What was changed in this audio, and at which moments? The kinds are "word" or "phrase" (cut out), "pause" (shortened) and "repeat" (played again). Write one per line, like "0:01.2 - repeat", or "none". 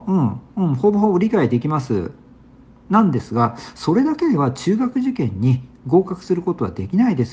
none